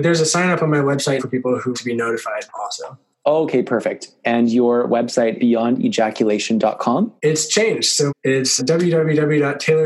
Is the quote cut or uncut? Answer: cut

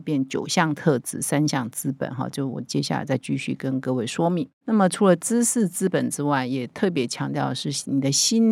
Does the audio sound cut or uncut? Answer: uncut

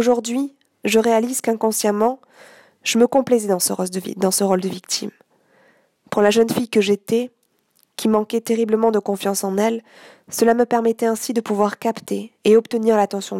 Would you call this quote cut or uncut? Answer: uncut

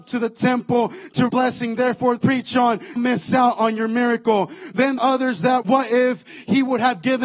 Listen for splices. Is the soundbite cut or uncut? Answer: cut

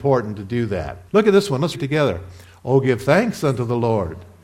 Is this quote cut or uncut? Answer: cut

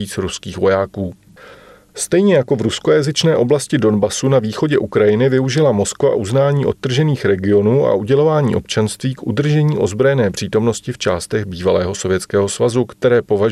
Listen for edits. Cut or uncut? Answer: uncut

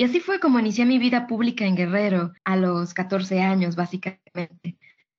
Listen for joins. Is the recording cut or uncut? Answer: cut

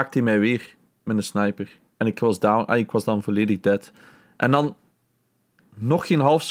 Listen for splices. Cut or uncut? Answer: uncut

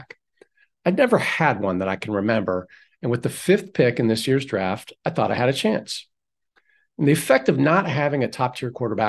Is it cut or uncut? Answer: uncut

